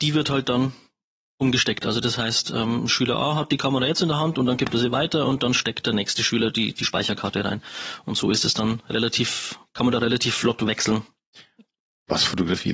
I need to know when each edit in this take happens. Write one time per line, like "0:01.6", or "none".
none